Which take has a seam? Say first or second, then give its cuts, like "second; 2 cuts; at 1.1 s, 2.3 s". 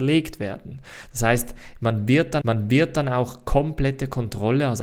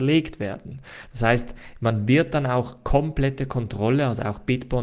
first; 1 cut; at 2.4 s